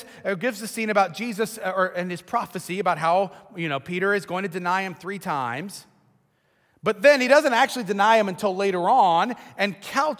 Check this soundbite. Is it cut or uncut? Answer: uncut